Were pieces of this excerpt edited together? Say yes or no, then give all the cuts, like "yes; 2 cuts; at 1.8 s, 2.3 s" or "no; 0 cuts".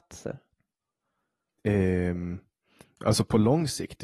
no; 0 cuts